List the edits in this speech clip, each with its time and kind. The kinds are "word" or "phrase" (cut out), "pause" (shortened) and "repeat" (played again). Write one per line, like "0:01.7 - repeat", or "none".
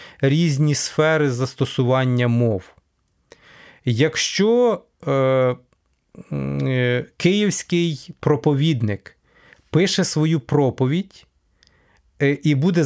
none